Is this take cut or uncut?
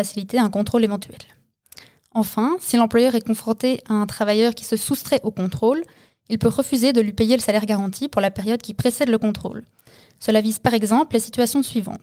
uncut